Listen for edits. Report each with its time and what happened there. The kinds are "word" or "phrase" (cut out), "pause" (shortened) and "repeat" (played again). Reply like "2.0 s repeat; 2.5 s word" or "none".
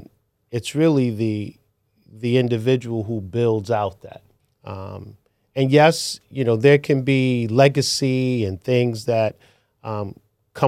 4.4 s pause